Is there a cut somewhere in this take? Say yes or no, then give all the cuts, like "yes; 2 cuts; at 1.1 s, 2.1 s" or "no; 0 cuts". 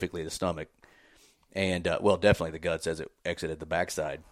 no; 0 cuts